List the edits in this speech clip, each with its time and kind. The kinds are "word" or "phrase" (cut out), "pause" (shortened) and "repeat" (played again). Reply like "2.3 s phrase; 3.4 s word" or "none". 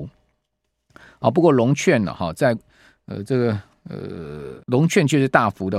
4.6 s pause